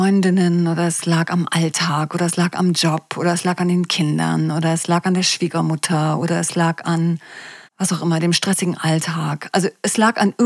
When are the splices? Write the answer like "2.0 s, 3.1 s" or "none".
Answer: 7.7 s